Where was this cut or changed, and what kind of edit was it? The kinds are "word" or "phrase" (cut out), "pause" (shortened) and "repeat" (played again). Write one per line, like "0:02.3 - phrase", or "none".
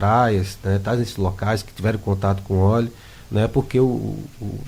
none